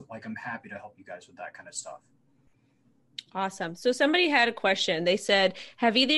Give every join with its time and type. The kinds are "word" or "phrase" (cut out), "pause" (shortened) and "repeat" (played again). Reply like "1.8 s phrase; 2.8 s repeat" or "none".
none